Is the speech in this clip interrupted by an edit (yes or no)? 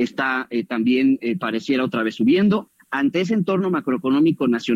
no